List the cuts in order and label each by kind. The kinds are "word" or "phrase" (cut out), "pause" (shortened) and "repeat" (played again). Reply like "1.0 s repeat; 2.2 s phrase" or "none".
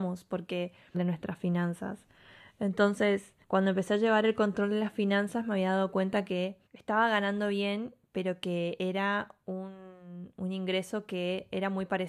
0.9 s phrase; 3.4 s pause; 6.7 s pause